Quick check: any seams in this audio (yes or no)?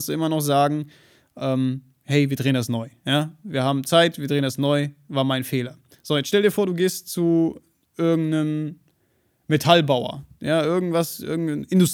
no